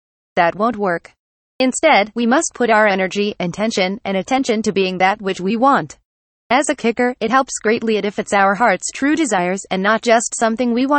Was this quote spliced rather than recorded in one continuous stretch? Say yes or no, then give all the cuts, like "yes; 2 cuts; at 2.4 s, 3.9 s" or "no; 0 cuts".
no; 0 cuts